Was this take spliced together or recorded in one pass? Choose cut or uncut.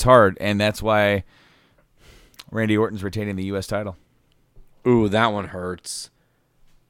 uncut